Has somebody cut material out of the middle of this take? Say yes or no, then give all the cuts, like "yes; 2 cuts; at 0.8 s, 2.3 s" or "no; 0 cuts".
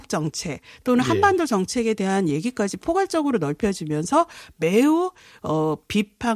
no; 0 cuts